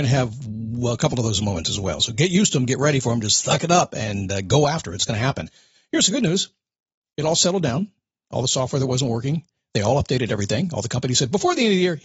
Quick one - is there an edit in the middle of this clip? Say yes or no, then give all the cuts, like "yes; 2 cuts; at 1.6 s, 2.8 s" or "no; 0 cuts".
no; 0 cuts